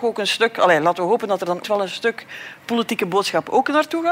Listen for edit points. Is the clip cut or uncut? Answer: cut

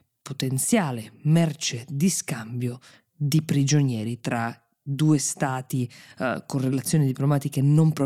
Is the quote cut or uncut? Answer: uncut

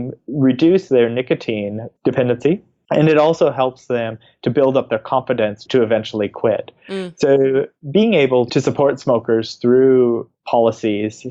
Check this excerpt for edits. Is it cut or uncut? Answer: uncut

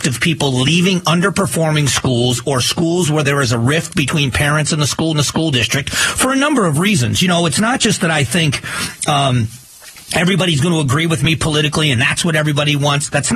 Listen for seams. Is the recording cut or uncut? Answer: cut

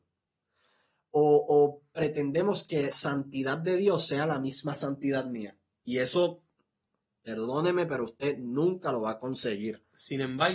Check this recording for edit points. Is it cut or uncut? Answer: cut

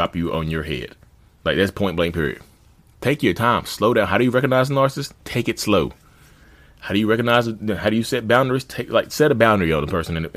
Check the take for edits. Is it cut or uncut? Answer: cut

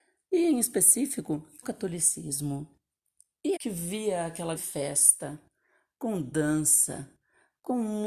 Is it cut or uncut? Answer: cut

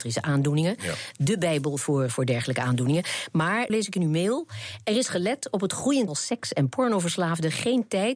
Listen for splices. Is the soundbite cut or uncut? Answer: cut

